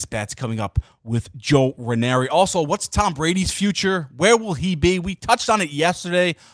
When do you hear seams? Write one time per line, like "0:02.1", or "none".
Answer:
none